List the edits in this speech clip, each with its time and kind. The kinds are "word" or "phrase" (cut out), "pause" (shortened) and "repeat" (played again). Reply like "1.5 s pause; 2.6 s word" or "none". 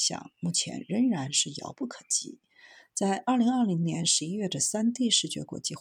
none